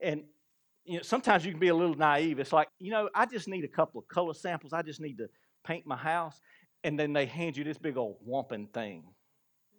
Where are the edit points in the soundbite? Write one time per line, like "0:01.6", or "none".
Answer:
0:02.7